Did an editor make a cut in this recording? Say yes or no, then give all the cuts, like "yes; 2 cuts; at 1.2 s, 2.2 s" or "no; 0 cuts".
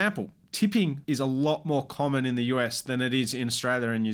yes; 1 cut; at 1.0 s